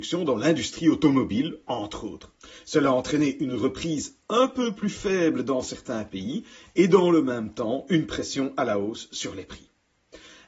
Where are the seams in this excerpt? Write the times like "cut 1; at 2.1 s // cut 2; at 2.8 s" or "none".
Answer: none